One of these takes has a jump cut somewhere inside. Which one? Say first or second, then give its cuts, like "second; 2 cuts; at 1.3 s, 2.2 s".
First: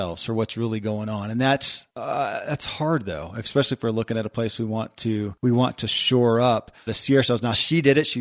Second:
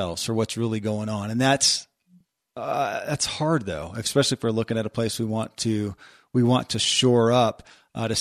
first; 3 cuts; at 1.9 s, 5.4 s, 6.9 s